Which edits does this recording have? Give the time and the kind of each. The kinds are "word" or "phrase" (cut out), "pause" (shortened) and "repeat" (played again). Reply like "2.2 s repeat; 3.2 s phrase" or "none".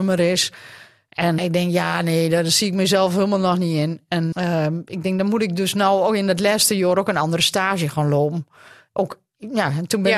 1.4 s word; 4.3 s word